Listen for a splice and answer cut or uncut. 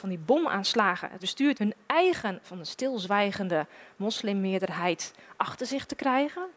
cut